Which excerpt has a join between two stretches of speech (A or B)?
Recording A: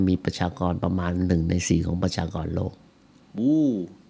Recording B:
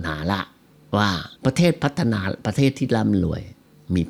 B